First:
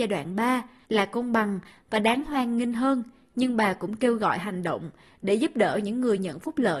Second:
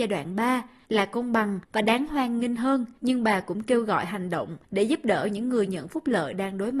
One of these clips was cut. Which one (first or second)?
second